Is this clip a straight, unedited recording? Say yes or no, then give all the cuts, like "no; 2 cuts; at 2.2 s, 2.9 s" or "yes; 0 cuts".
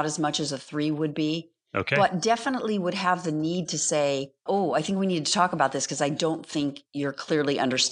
no; 1 cut; at 4.5 s